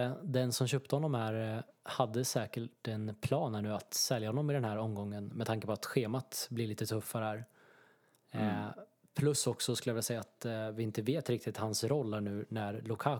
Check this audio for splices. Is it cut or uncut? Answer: uncut